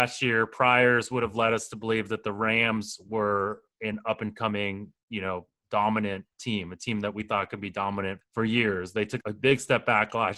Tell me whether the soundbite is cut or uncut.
cut